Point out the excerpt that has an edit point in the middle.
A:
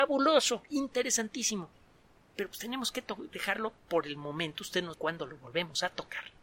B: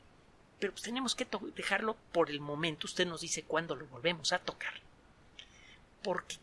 A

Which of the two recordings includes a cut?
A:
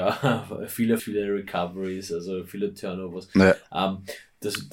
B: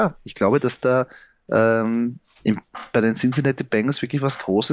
A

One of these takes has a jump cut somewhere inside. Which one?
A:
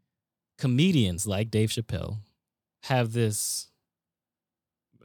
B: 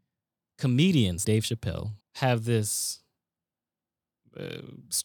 B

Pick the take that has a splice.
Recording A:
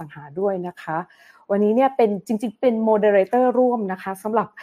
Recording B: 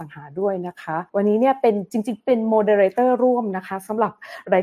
B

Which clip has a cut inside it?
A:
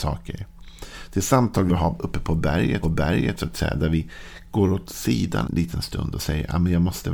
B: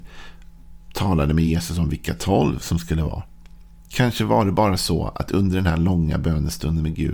A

